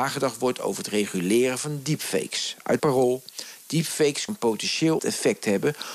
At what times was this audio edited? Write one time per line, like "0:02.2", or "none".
0:02.8
0:04.3
0:05.0